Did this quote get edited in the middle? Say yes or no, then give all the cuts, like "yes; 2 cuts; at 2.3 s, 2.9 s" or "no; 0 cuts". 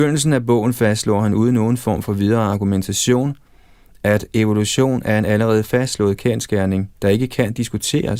yes; 1 cut; at 6.9 s